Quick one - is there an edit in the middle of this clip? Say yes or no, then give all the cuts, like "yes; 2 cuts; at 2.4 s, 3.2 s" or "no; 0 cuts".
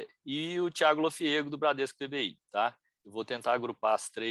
yes; 1 cut; at 3.0 s